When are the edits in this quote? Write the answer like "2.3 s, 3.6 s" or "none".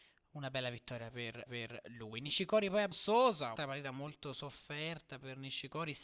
1.5 s, 2.9 s, 3.6 s